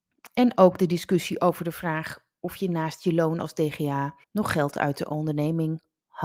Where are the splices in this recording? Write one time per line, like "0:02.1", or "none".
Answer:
0:04.2